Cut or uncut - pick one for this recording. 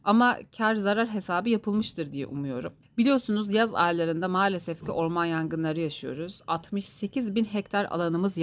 cut